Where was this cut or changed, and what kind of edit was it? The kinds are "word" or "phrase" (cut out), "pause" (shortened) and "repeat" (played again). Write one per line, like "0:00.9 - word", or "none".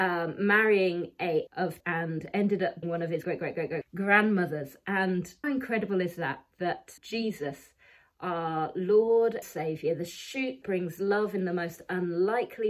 0:01.5 - word
0:01.8 - word
0:02.8 - word
0:03.2 - word
0:03.8 - word
0:05.4 - word
0:07.0 - word
0:09.4 - word
0:10.6 - word